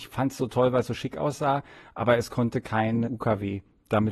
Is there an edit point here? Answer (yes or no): yes